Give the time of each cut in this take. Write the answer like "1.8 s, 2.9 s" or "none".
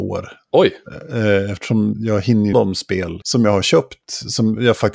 1.9 s, 2.5 s, 3.2 s